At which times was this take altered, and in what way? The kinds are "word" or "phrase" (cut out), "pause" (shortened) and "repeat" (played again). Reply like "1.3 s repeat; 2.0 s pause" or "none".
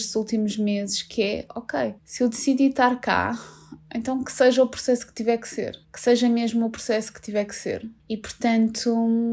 2.0 s pause; 5.8 s pause; 8.0 s pause